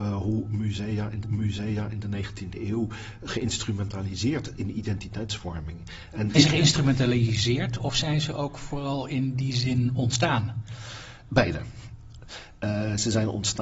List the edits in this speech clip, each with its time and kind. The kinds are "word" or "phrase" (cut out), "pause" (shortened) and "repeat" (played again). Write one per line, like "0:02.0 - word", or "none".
0:01.2 - repeat
0:04.5 - word
0:06.3 - word